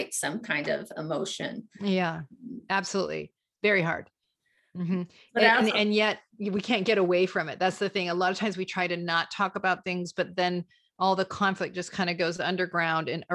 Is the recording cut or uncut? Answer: uncut